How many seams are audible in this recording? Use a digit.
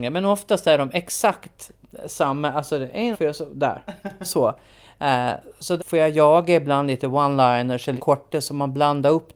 3